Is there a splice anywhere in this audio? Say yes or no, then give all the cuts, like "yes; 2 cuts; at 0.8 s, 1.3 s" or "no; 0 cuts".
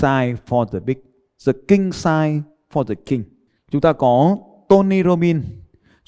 no; 0 cuts